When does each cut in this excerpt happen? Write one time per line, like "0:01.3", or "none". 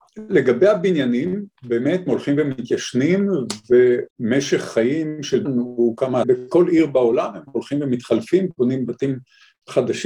0:02.1
0:04.1
0:05.5
0:06.2